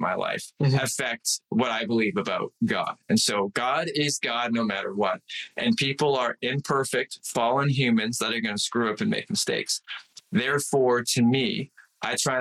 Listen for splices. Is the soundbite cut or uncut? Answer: uncut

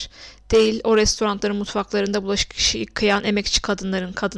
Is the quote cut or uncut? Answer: uncut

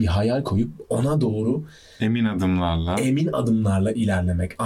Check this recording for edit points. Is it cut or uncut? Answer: uncut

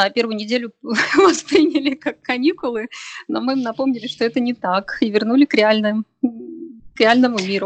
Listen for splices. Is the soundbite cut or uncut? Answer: uncut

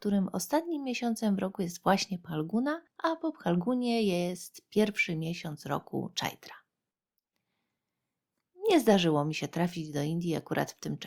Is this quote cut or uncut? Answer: cut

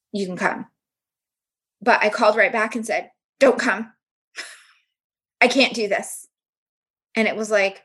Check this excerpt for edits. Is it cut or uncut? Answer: uncut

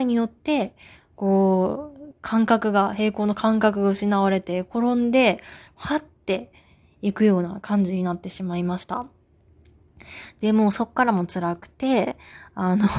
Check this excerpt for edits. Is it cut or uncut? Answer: uncut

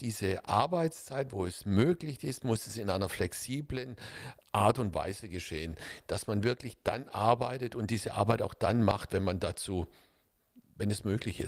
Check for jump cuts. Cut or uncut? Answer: cut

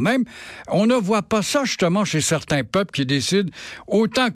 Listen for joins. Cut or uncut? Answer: uncut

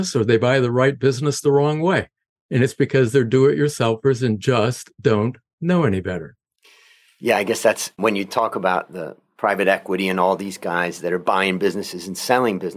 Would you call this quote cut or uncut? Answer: uncut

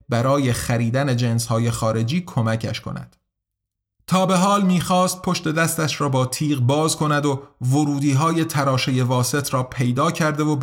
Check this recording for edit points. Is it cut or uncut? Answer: uncut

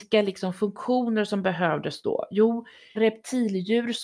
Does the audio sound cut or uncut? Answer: cut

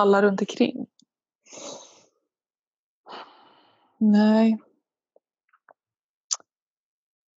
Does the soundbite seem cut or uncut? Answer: uncut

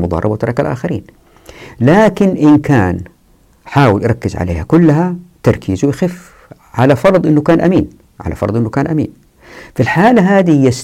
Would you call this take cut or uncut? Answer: uncut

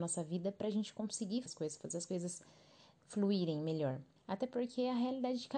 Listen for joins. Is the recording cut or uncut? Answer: cut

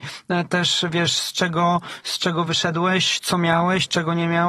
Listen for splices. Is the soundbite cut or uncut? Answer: uncut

